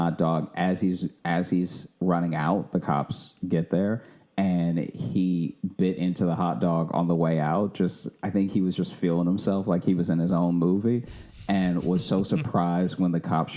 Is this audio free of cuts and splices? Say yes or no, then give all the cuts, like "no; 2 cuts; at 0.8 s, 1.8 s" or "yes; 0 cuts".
yes; 0 cuts